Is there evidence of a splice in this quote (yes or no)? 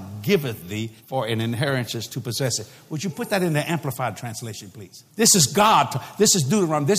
yes